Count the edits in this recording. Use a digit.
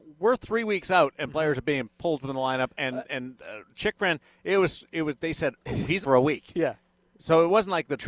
1